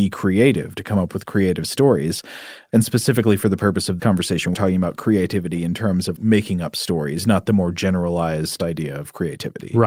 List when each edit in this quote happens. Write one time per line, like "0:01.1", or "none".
0:04.0
0:04.5
0:06.2